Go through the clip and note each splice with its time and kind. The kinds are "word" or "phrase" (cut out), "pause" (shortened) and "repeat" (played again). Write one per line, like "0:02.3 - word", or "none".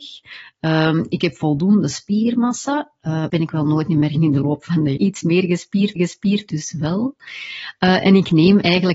0:03.3 - word
0:04.1 - word
0:05.0 - phrase
0:06.0 - repeat